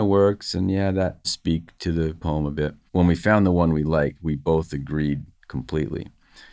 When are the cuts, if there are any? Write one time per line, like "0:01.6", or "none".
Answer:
0:01.2
0:02.9